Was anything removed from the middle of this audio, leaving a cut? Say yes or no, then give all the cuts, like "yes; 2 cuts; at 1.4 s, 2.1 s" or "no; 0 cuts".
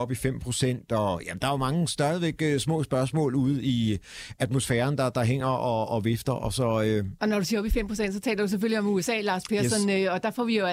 no; 0 cuts